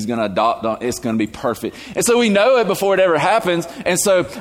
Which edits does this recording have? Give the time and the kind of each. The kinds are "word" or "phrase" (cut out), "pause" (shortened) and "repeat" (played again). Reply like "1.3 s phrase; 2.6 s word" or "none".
none